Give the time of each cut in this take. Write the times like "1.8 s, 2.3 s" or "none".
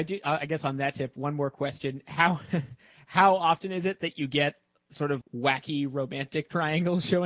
5.2 s